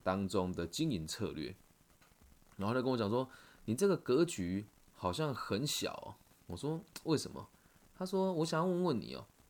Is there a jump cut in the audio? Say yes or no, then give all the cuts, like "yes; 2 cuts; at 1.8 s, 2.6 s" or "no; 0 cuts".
yes; 1 cut; at 7.6 s